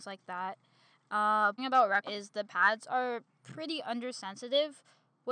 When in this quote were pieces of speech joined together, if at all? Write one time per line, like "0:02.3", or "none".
0:01.6
0:02.0